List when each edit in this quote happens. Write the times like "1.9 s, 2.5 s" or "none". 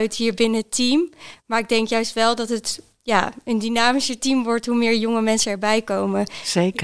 none